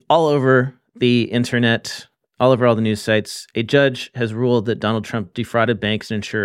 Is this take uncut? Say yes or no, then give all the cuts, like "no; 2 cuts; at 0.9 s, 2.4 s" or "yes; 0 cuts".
yes; 0 cuts